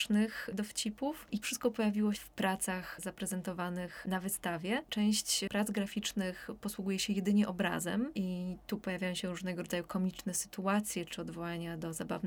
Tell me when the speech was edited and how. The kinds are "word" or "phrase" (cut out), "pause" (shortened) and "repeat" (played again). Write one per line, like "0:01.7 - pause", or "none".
0:01.4 - word
0:02.1 - word